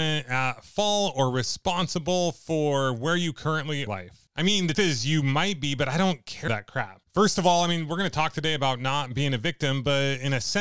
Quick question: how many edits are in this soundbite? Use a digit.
5